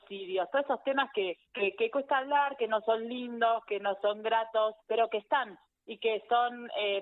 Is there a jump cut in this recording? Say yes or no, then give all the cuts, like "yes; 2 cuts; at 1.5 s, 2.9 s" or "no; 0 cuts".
yes; 1 cut; at 1.4 s